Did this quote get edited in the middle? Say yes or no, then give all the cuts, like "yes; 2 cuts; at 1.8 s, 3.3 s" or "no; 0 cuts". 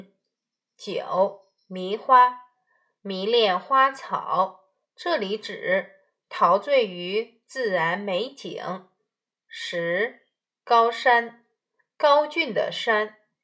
no; 0 cuts